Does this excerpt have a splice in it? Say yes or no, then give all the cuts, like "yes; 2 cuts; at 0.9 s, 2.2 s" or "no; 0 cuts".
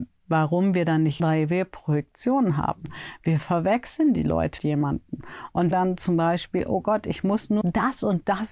yes; 4 cuts; at 1.2 s, 4.6 s, 5.7 s, 7.6 s